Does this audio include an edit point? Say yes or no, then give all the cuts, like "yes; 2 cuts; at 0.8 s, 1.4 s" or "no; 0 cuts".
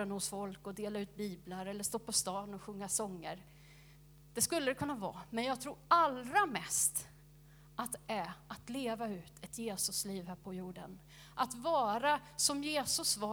no; 0 cuts